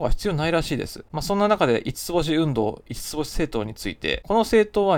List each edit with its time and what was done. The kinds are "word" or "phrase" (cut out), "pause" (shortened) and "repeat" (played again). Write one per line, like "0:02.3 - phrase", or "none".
0:01.1 - pause